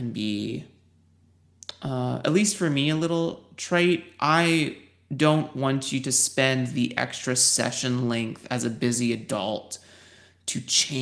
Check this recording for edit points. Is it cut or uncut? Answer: uncut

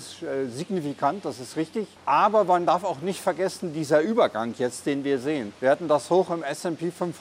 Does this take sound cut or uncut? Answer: cut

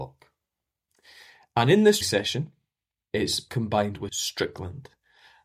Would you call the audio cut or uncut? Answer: cut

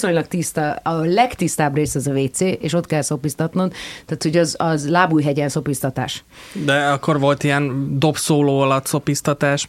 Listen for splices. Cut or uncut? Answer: uncut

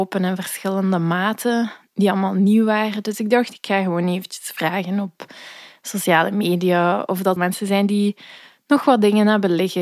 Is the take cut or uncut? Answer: cut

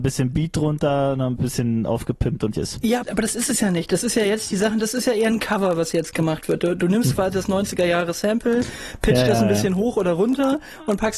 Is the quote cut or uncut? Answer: cut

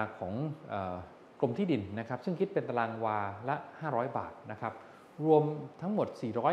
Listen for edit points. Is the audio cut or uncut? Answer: uncut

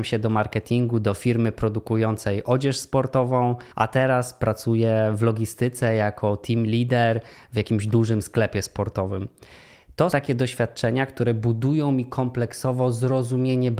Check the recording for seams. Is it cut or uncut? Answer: cut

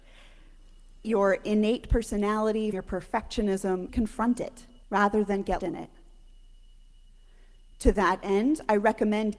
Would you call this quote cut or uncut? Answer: cut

